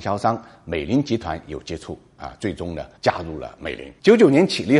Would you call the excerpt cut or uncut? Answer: cut